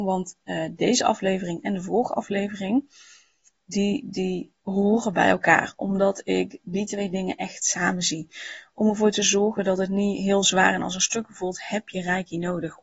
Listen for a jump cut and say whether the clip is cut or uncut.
uncut